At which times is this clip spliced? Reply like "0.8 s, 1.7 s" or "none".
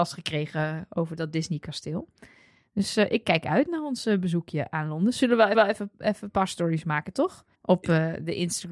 5.5 s, 7.5 s